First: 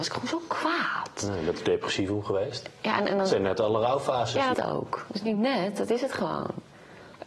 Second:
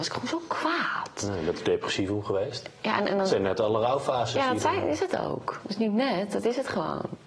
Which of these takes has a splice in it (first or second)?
first